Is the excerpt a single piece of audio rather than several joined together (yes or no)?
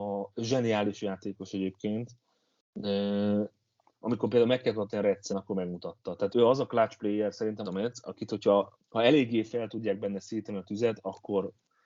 no